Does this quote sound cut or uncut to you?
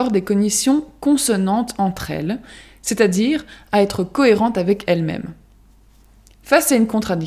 uncut